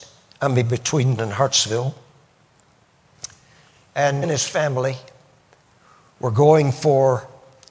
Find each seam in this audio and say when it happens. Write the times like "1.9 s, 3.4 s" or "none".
1.2 s, 4.2 s